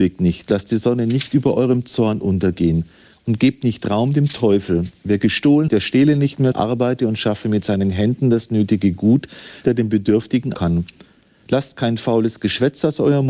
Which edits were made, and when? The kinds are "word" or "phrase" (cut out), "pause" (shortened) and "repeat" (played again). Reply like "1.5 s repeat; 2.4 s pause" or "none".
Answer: 5.7 s word; 6.5 s word; 9.6 s word; 10.5 s word